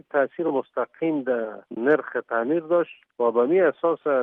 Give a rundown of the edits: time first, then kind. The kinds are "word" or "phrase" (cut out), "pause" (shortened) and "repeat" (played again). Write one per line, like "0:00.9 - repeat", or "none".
0:01.7 - pause
0:03.1 - pause